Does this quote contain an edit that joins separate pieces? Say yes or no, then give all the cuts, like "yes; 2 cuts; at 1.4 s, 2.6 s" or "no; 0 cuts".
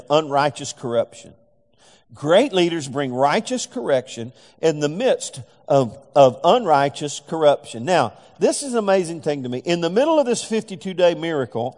no; 0 cuts